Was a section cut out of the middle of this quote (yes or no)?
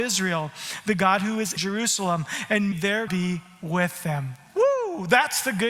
yes